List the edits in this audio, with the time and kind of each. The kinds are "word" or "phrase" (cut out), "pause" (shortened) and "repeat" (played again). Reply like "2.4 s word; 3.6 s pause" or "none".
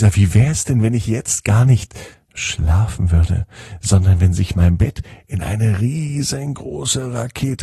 none

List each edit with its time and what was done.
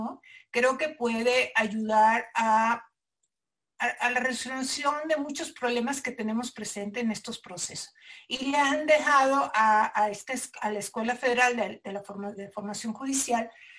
12.3 s word

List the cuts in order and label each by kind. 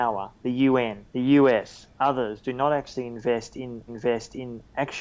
1.1 s pause; 3.9 s repeat

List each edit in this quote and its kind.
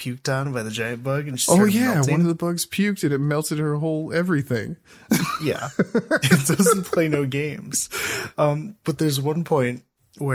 none

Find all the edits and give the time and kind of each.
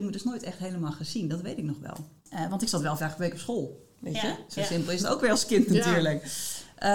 2.2 s pause; 3.0 s word; 3.9 s pause

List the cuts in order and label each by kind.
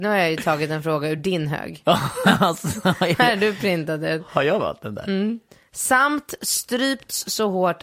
none

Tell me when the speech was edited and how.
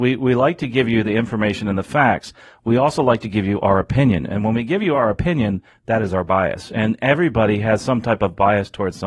none

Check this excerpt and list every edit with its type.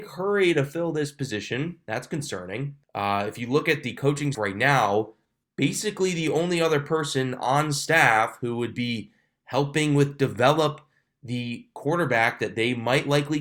2.8 s pause; 4.3 s word; 5.4 s pause

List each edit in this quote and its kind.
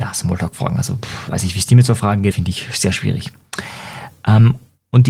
2.3 s word

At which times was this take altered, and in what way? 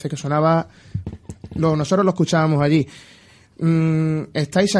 none

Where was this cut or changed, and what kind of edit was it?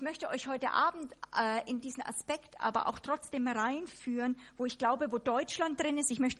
none

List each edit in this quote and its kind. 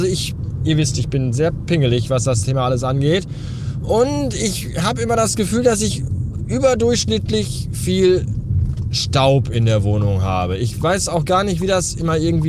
none

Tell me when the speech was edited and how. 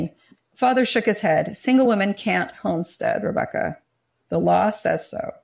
none

